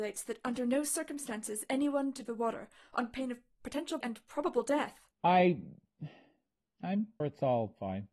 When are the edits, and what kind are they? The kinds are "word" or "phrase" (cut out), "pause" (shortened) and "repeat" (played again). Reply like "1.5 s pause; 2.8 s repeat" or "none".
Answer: 1.7 s word; 2.3 s word; 4.0 s word; 5.1 s pause; 7.2 s word